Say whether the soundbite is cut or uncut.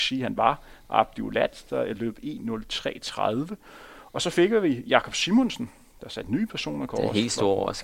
uncut